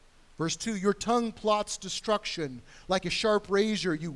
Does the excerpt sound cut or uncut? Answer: uncut